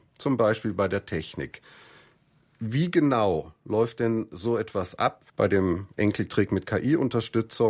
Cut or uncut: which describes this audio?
cut